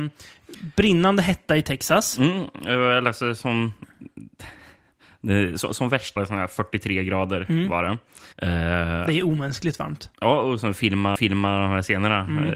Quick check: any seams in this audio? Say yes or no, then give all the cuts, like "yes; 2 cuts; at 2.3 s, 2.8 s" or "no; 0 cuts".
yes; 4 cuts; at 6.2 s, 8.3 s, 10.1 s, 11.2 s